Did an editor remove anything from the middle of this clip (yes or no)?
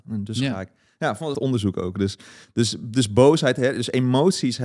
yes